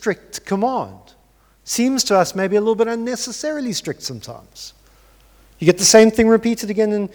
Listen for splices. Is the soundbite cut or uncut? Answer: uncut